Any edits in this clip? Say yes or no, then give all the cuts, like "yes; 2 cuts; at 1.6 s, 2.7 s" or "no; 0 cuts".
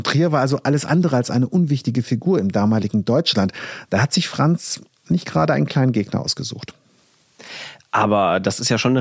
no; 0 cuts